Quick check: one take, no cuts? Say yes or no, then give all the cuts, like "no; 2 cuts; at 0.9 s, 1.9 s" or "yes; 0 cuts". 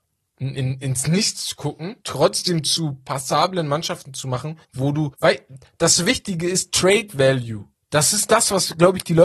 no; 4 cuts; at 2.0 s, 4.6 s, 5.1 s, 7.7 s